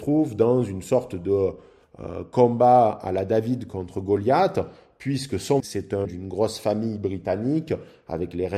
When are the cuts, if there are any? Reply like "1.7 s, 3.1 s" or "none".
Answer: 5.6 s, 6.0 s